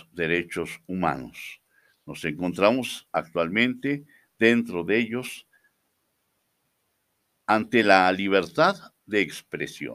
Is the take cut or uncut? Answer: uncut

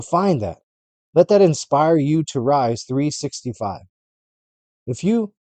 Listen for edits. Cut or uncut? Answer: uncut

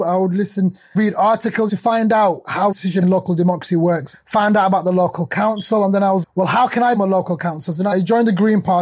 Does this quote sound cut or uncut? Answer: cut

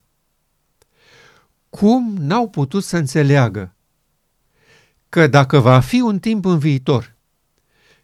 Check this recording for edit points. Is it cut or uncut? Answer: uncut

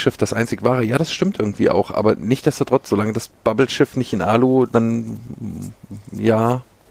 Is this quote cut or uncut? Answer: uncut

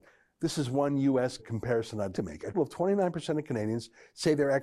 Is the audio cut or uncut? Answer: cut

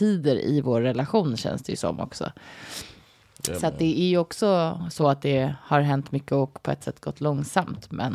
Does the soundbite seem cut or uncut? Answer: uncut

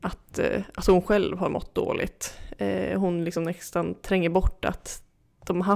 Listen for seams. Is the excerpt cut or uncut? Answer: uncut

